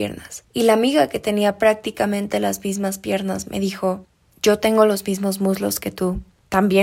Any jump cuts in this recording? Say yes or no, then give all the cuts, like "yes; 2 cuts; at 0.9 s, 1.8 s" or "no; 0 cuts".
no; 0 cuts